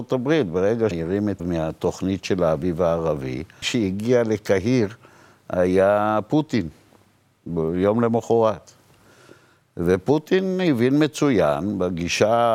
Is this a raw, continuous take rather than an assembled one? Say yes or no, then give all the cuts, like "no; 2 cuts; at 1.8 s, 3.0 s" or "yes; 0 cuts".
no; 3 cuts; at 0.9 s, 1.4 s, 3.6 s